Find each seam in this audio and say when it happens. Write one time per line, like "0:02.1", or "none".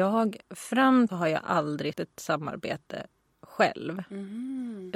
0:01.1
0:01.9